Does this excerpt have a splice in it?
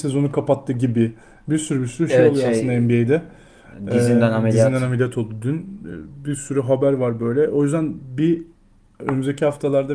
no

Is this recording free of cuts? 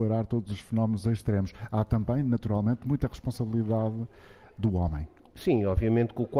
yes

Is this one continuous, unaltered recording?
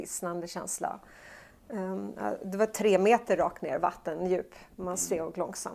yes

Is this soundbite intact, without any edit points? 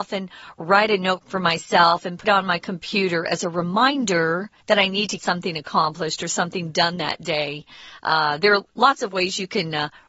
no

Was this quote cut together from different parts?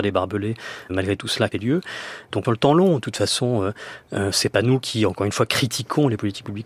yes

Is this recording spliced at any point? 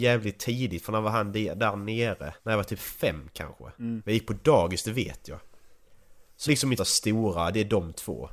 yes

